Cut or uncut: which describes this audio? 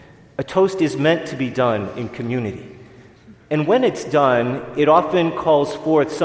uncut